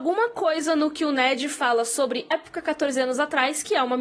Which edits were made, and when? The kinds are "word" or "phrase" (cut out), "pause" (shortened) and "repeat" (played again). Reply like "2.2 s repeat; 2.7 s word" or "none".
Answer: 2.3 s word